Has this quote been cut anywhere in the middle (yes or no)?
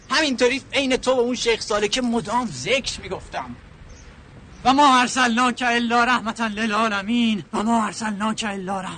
yes